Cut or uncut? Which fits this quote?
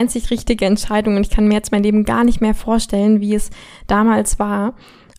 uncut